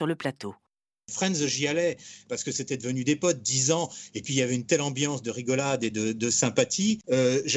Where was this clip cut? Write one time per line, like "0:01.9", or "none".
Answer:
none